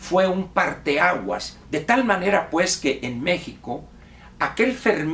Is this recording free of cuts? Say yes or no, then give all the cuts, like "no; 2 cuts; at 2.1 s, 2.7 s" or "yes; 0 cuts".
no; 1 cut; at 1.6 s